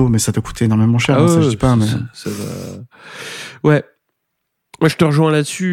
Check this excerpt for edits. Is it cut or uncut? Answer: uncut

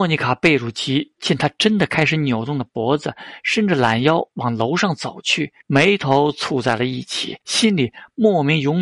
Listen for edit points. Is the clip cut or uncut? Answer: cut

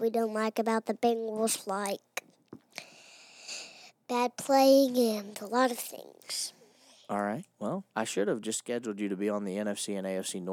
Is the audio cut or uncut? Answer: cut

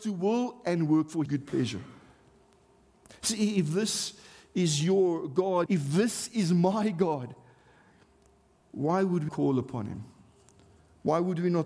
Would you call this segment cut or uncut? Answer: cut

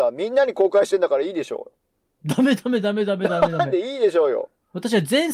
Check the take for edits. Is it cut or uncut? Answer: uncut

